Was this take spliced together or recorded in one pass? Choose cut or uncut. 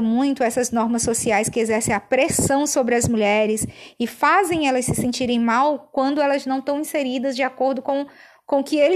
uncut